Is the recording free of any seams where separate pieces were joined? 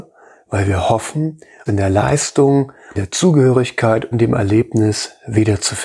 no; 3 cuts; at 1.7 s, 3.0 s, 4.1 s

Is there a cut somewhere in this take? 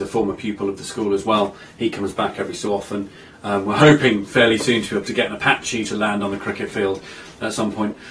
no; 0 cuts

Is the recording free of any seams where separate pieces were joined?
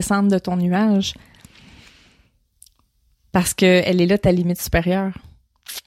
yes; 0 cuts

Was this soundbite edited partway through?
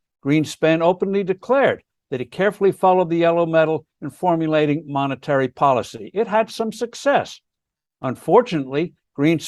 no; 0 cuts

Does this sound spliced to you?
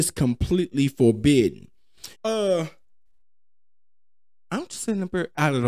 yes; 1 cut; at 2.1 s

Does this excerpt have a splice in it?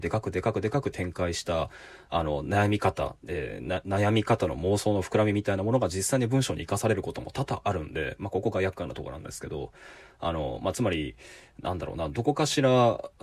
no; 0 cuts

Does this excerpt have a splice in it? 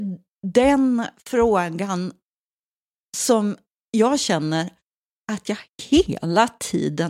no; 0 cuts

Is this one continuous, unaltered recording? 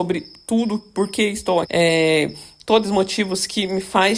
no; 2 cuts; at 1.6 s, 2.8 s

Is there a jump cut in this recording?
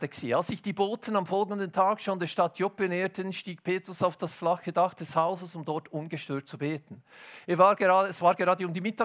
no; 0 cuts

